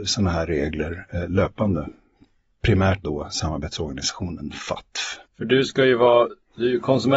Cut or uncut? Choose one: cut